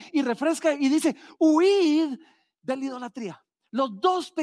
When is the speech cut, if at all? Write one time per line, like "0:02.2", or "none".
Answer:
none